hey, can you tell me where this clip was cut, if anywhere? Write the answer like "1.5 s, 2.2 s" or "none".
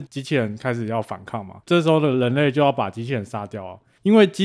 1.6 s